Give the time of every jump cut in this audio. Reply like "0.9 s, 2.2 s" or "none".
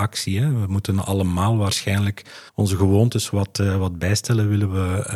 2.5 s